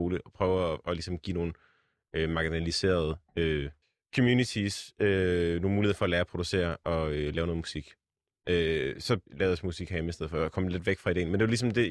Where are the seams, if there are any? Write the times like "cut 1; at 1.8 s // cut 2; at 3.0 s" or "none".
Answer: cut 1; at 3.8 s // cut 2; at 9.3 s